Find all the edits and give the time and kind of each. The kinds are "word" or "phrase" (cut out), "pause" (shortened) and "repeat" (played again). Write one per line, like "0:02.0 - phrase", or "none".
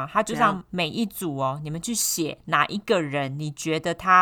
0:02.4 - pause